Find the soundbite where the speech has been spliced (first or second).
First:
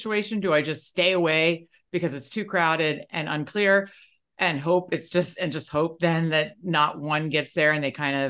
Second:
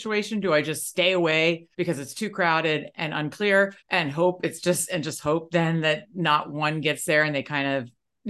second